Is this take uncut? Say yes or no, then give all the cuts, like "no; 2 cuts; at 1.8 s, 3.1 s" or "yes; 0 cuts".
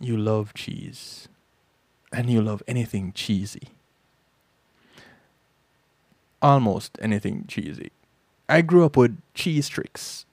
yes; 0 cuts